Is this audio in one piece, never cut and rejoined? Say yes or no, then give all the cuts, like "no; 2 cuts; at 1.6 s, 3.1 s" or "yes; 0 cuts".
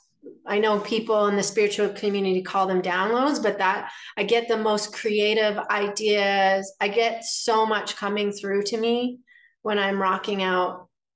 yes; 0 cuts